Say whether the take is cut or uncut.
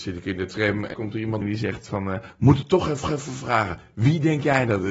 cut